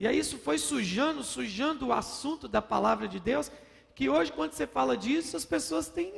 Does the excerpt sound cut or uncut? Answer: uncut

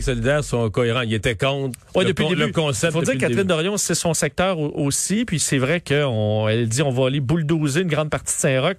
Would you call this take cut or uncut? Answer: uncut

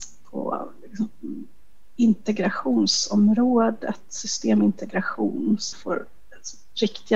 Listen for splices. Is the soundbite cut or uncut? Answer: cut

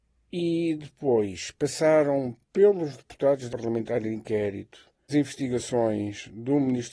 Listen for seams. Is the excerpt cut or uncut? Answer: cut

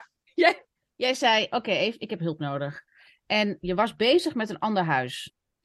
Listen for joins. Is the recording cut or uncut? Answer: uncut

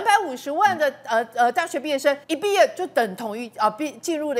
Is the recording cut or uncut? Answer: cut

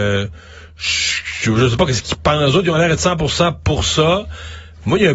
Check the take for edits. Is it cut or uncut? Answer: uncut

